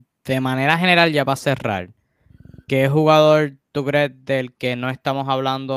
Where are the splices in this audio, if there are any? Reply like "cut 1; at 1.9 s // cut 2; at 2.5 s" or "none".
cut 1; at 3.6 s